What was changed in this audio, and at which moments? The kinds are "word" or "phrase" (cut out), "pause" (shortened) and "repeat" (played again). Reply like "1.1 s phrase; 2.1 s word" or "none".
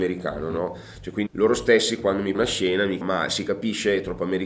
1.3 s word; 2.3 s word; 3.0 s word